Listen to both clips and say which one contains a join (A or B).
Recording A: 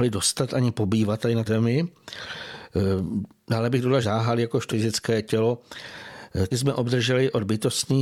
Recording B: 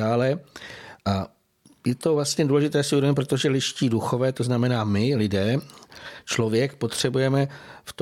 A